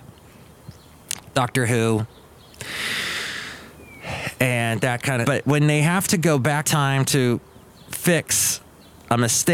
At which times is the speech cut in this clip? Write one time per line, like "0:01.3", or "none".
0:05.2
0:06.7